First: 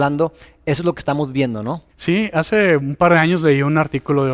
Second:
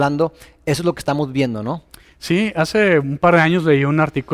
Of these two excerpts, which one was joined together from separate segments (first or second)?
first